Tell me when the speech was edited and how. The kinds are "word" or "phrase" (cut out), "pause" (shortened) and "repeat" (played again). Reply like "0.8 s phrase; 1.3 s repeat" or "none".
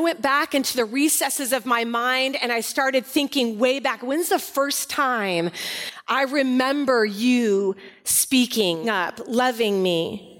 8.8 s word